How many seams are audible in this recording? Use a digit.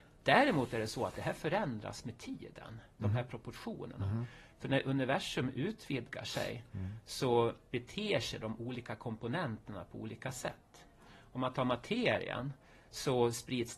0